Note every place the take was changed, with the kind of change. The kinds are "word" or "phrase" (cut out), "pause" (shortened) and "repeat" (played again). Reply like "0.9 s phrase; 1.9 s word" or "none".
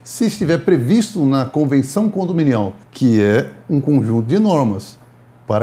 2.8 s pause